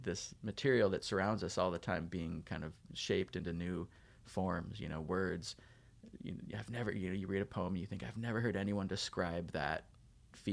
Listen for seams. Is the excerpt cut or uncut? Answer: uncut